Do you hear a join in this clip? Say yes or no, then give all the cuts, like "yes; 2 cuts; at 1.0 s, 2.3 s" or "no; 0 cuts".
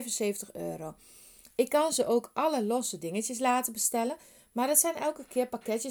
no; 0 cuts